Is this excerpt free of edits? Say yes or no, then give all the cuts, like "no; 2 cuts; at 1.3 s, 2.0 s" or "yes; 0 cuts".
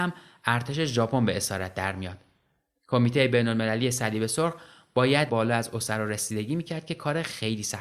no; 1 cut; at 5.3 s